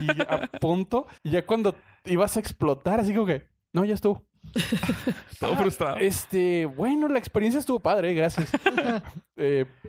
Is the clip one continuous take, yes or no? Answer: no